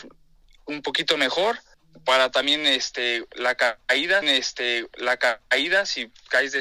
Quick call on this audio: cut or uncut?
cut